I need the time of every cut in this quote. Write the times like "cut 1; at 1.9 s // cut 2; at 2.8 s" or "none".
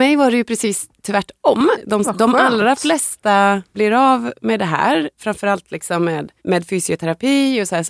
cut 1; at 1.0 s // cut 2; at 2.0 s // cut 3; at 3.7 s // cut 4; at 6.4 s